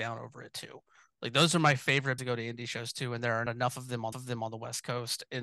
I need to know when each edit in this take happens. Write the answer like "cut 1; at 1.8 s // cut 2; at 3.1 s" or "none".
cut 1; at 2.2 s // cut 2; at 3.5 s // cut 3; at 4.1 s